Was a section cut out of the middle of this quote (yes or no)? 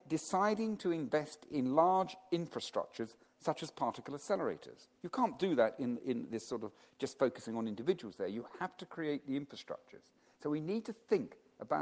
yes